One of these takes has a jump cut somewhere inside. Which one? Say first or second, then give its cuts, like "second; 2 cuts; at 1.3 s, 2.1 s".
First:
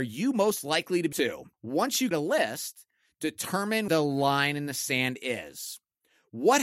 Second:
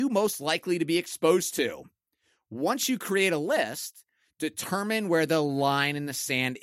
first; 4 cuts; at 1.1 s, 1.5 s, 2.1 s, 3.9 s